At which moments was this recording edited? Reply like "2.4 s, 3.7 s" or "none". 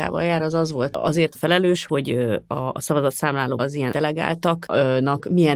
0.9 s, 1.3 s, 1.9 s, 3.6 s, 3.9 s